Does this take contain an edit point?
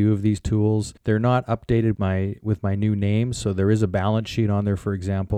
yes; 2 cuts; at 1.0 s, 1.9 s

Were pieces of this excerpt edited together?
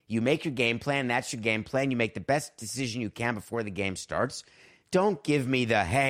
no; 0 cuts

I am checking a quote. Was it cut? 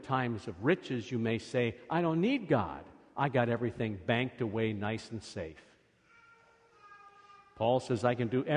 no; 0 cuts

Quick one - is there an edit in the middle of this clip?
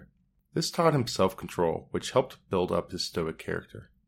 no; 0 cuts

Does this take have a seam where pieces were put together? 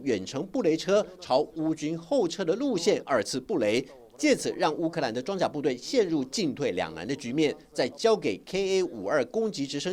no; 0 cuts

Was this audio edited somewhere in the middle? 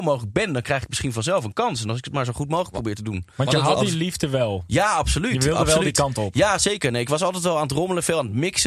no; 0 cuts

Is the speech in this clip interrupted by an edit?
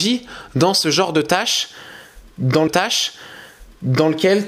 yes; 1 cut; at 2.7 s

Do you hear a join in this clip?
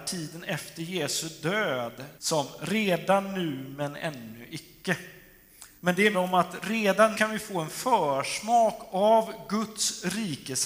yes; 4 cuts; at 2.2 s, 5.8 s, 6.1 s, 7.1 s

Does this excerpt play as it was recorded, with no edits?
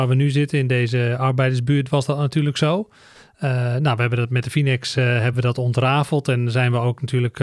yes; 0 cuts

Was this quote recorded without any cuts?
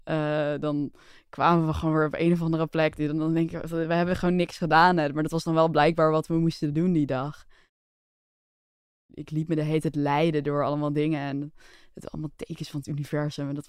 yes; 0 cuts

